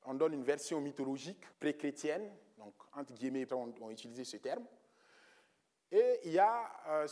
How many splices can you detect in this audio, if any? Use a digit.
2